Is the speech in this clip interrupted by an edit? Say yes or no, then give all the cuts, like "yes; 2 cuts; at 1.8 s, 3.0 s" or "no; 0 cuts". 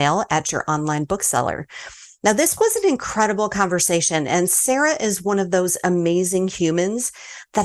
no; 0 cuts